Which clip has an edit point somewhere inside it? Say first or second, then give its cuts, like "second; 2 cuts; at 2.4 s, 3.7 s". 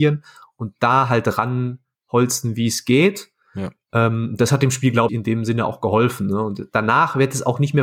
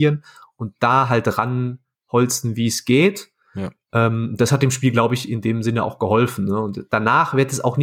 first; 1 cut; at 5.1 s